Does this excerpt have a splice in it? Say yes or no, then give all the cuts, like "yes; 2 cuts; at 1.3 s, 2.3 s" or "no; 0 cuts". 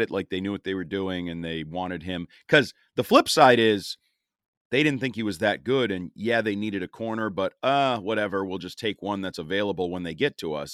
no; 0 cuts